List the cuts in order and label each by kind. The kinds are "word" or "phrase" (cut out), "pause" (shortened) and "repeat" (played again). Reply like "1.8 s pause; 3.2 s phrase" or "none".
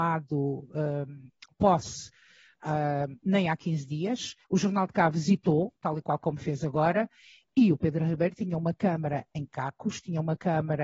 4.4 s pause; 5.8 s pause

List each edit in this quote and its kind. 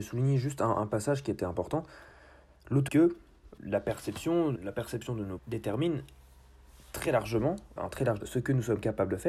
2.9 s word; 3.6 s word; 4.6 s word; 5.4 s word; 7.8 s word; 8.2 s word

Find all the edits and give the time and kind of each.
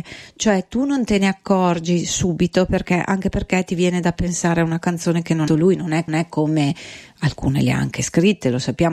5.5 s phrase; 6.1 s repeat

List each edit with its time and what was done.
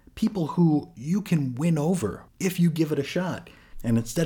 2.3 s word

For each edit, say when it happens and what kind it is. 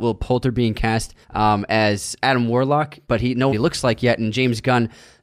1.2 s pause; 2.2 s word; 3.0 s pause; 3.5 s phrase

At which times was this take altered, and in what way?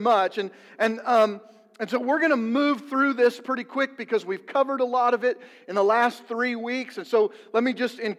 none

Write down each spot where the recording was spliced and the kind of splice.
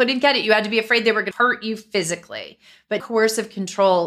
1.3 s word; 3.0 s word

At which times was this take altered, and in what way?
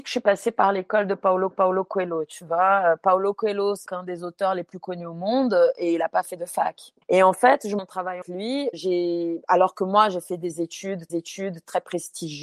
1.5 s repeat; 3.9 s word; 7.0 s pause; 7.8 s word; 8.2 s word; 8.7 s word; 11.1 s repeat

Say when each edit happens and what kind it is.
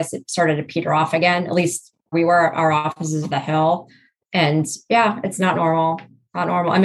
2.1 s word; 3.2 s word

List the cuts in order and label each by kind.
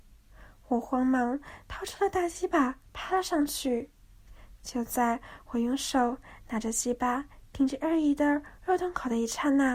2.9 s pause

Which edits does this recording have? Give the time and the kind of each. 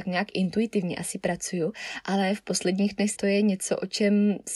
3.1 s phrase

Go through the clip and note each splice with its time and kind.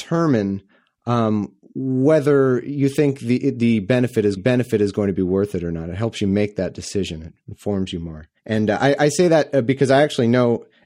4.4 s repeat; 8.4 s pause

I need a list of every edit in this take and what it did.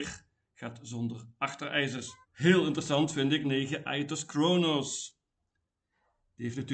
2.2 s pause; 3.4 s word

